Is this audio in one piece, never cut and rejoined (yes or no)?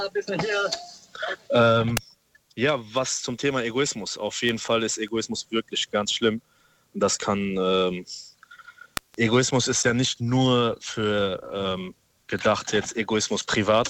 yes